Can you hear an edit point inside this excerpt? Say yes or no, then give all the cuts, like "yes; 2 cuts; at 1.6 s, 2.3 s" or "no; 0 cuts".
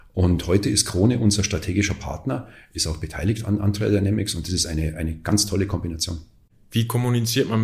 no; 0 cuts